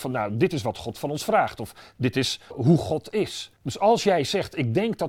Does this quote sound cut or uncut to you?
cut